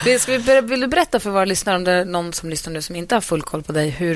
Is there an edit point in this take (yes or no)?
no